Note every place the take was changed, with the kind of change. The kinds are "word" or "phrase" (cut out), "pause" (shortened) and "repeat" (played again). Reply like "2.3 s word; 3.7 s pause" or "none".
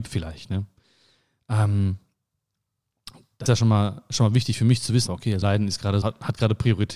3.5 s word; 5.1 s word; 5.4 s word; 6.0 s word